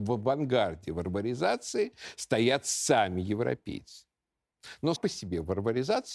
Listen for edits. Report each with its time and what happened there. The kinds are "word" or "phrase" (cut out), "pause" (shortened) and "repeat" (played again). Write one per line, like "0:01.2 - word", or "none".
0:05.0 - word